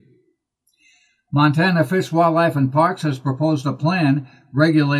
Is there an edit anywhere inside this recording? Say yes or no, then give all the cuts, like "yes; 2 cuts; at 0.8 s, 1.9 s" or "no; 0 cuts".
no; 0 cuts